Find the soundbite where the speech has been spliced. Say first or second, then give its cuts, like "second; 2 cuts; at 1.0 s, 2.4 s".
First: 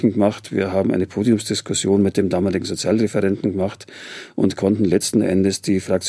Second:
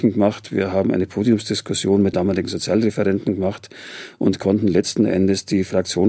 second; 1 cut; at 2.1 s